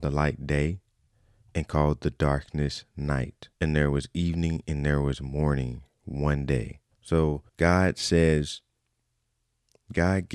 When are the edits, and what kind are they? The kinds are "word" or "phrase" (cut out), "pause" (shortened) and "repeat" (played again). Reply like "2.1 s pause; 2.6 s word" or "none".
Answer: 3.6 s pause; 7.5 s pause